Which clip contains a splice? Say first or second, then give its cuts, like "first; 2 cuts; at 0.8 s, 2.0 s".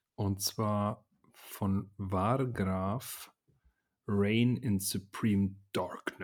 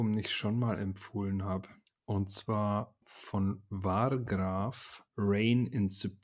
second; 3 cuts; at 1.8 s, 3.0 s, 5.1 s